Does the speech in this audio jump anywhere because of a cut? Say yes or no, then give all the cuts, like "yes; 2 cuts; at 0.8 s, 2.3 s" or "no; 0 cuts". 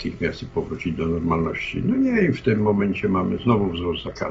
no; 0 cuts